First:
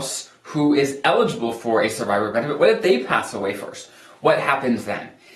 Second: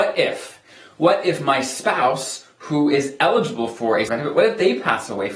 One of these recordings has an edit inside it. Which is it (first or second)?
second